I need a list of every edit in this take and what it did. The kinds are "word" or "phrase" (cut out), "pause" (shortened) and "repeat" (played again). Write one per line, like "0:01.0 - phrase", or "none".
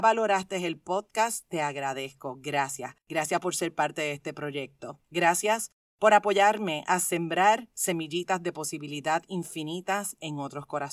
0:03.0 - pause
0:05.0 - pause

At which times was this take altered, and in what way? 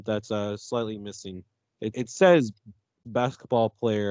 0:01.9 - word
0:03.0 - word

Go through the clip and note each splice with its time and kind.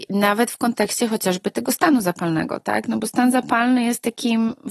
none

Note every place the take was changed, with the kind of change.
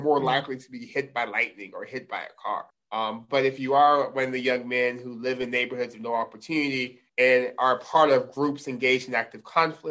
0:02.7 - pause
0:07.1 - pause

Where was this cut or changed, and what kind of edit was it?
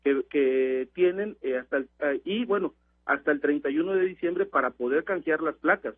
none

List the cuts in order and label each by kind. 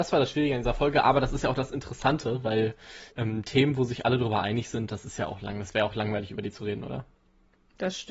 0:03.1 - pause

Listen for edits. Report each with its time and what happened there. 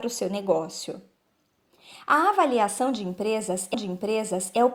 0:03.7 - repeat

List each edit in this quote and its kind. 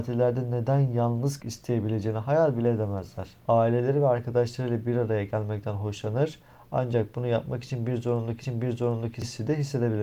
0:01.4 - word
0:03.4 - pause
0:08.4 - repeat

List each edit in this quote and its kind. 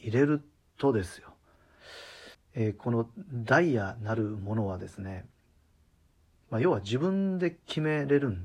0:02.3 - pause

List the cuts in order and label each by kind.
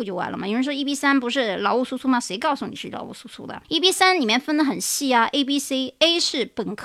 0:03.6 - pause

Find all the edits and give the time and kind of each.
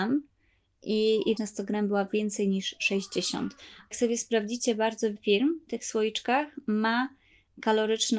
0:01.4 - phrase
0:03.9 - word
0:05.2 - word

